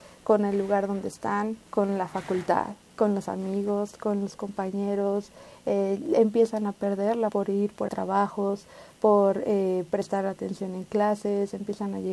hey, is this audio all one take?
no; 3 cuts; at 1.7 s, 7.3 s, 7.9 s

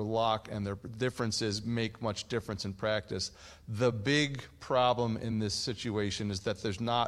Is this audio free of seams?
yes; 0 cuts

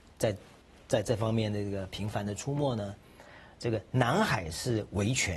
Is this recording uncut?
yes; 0 cuts

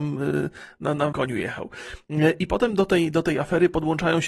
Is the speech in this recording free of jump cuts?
no; 1 cut; at 1.1 s

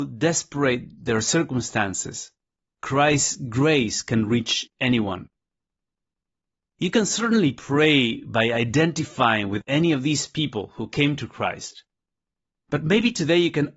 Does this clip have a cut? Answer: no; 0 cuts

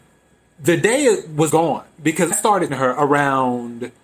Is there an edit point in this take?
yes; 3 cuts; at 1.5 s, 2.3 s, 2.7 s

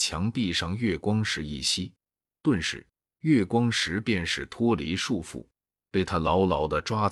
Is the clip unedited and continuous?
yes; 0 cuts

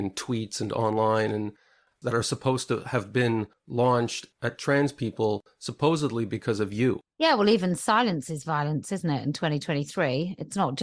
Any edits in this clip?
no; 0 cuts

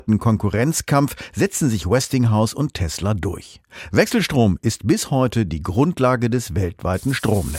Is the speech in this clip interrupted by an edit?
no; 0 cuts

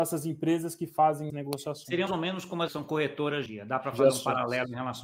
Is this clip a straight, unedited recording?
no; 4 cuts; at 1.3 s, 2.1 s, 2.7 s, 3.5 s

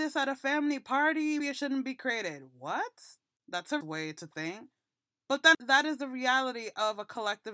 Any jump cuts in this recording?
yes; 3 cuts; at 1.4 s, 3.8 s, 5.5 s

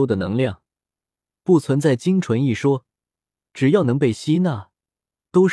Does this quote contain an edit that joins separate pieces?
no; 0 cuts

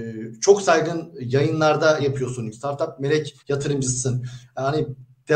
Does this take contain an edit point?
yes; 3 cuts; at 2.0 s, 2.5 s, 3.4 s

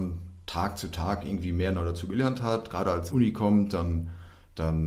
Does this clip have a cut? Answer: yes; 1 cut; at 3.1 s

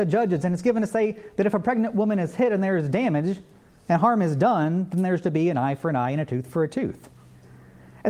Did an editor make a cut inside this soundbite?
no; 0 cuts

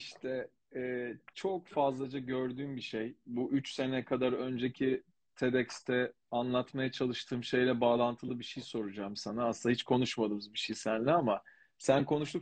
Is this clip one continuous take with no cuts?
yes; 0 cuts

